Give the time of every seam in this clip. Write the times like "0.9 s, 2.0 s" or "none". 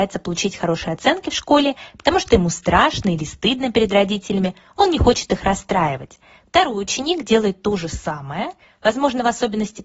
none